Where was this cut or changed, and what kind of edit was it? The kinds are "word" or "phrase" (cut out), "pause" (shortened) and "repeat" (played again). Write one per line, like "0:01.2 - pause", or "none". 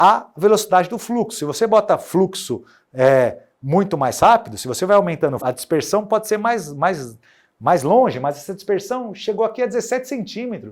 0:05.4 - phrase